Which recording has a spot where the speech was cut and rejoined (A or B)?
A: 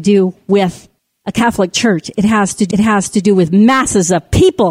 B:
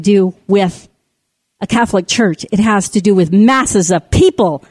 A